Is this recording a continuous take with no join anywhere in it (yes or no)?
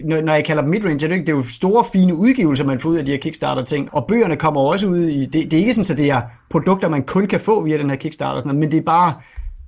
no